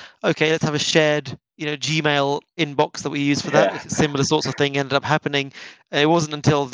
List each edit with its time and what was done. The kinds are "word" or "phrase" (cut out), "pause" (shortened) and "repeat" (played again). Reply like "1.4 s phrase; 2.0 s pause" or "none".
none